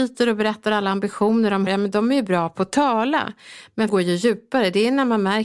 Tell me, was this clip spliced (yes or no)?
yes